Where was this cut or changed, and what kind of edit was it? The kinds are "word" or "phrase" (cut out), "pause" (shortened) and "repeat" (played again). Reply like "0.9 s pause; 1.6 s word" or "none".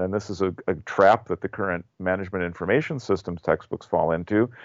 none